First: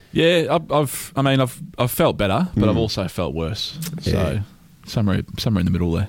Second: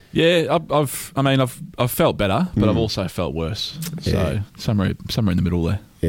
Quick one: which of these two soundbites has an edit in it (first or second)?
second